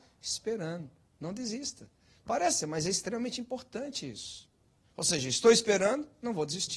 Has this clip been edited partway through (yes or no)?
yes